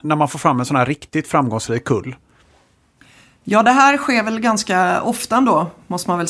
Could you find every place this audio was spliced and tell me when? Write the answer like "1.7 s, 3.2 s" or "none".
none